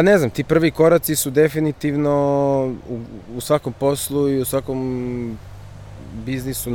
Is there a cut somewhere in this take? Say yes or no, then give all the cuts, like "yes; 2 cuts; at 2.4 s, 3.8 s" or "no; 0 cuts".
no; 0 cuts